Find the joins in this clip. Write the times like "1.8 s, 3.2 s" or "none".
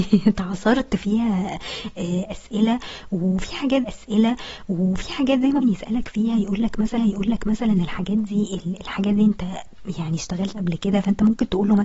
3.8 s, 5.6 s, 7.0 s, 10.5 s